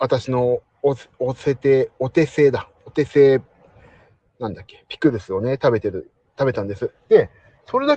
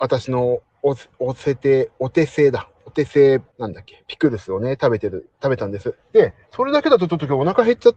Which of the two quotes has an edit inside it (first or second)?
second